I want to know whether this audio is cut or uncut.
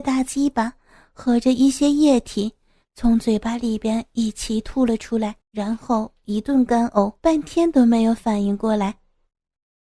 cut